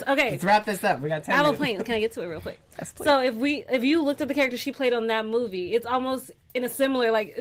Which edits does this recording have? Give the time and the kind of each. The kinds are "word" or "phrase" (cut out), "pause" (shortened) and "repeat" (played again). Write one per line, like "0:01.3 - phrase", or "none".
none